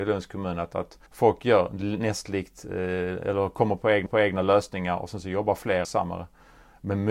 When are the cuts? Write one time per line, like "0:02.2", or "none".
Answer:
0:01.1
0:04.1
0:05.8